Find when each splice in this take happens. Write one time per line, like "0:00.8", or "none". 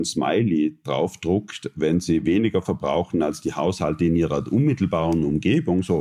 none